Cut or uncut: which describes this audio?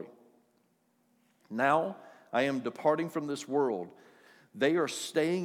uncut